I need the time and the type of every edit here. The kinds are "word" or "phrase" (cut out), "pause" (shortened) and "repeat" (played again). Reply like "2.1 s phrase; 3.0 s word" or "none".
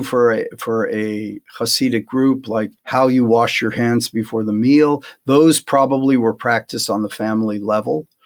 2.8 s pause

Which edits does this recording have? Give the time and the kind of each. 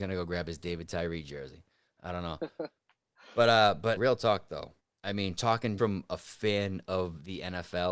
4.0 s word; 4.8 s pause; 5.8 s word

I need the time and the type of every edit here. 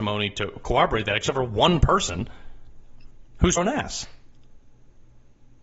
3.6 s phrase

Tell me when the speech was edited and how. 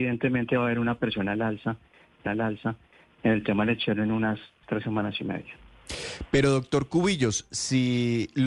2.3 s repeat; 4.6 s word

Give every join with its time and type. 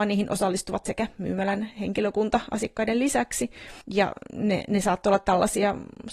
3.8 s pause

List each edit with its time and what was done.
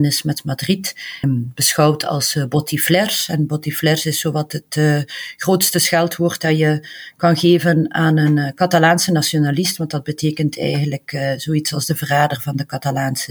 1.2 s word

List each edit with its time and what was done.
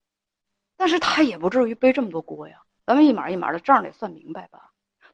2.7 s pause

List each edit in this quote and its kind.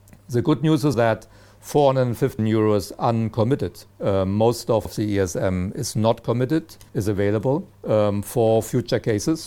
0.9 s word; 2.4 s word; 3.9 s pause; 4.9 s phrase; 6.9 s pause; 7.7 s pause

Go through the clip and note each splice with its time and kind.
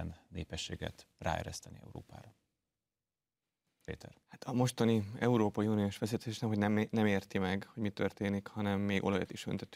4.2 s pause

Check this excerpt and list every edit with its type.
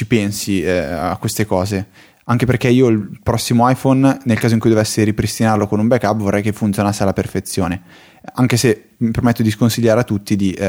none

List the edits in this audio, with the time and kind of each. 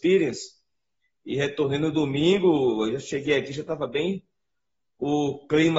none

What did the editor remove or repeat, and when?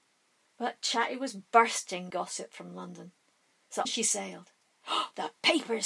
2.1 s word; 3.8 s word

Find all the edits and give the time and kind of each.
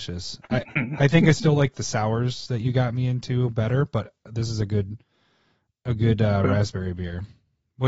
none

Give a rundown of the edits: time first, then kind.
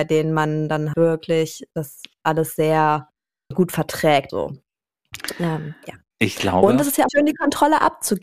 0.9 s word; 3.5 s word; 4.3 s word; 7.1 s word

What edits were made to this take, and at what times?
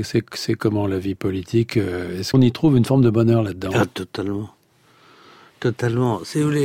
2.3 s phrase

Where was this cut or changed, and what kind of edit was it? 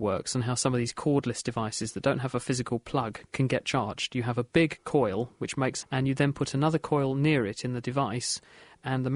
5.8 s phrase

